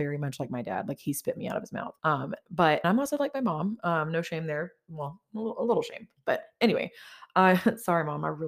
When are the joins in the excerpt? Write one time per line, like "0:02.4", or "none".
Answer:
0:02.0
0:02.8